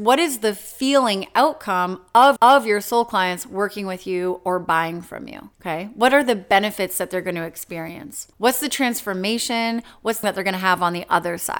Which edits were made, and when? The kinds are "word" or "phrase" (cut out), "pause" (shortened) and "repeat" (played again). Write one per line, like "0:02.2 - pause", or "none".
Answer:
0:02.4 - repeat
0:05.5 - pause
0:08.3 - pause
0:10.2 - word